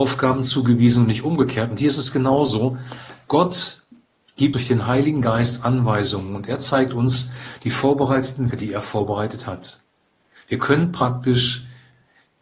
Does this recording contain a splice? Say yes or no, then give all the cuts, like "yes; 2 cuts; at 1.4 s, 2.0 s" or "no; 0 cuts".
yes; 2 cuts; at 4.5 s, 8.5 s